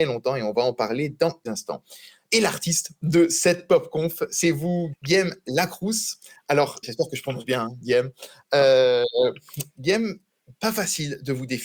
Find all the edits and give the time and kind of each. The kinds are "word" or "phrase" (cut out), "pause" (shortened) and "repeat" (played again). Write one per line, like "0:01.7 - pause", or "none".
0:01.5 - word
0:04.9 - word
0:06.8 - word
0:09.8 - word